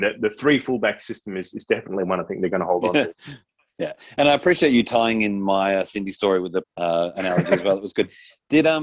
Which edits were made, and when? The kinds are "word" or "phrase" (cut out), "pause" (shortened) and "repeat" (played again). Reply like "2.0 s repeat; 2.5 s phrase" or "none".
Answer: 6.6 s phrase